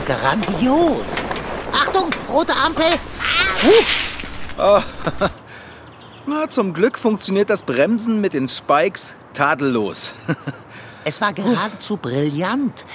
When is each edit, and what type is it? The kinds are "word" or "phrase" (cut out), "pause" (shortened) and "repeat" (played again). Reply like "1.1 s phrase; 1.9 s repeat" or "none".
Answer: none